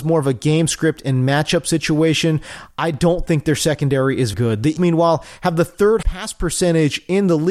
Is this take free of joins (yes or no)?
no